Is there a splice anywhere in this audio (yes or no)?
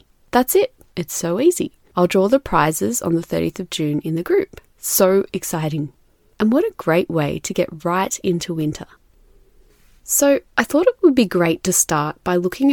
yes